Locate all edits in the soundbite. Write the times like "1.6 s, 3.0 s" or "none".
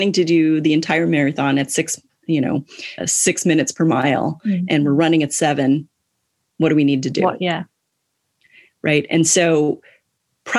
3.0 s